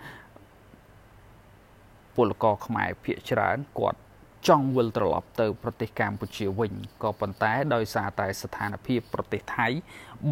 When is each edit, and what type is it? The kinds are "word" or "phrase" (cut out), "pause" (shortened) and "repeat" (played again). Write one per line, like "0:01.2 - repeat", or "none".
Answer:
0:04.3 - pause